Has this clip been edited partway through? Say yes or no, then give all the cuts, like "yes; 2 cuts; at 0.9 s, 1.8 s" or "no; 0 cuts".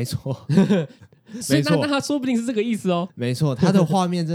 yes; 1 cut; at 3.1 s